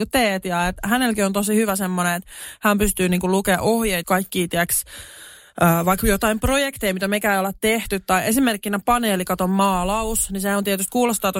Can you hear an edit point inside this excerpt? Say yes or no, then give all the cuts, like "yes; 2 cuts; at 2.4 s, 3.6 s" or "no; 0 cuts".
yes; 1 cut; at 4.0 s